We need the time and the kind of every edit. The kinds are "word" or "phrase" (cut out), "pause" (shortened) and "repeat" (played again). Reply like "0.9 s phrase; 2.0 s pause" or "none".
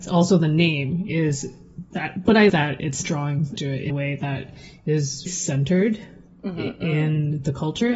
2.5 s word; 3.0 s word; 3.6 s word; 3.9 s word; 5.3 s word